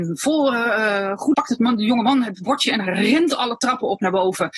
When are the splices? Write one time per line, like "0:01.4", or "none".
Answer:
0:01.3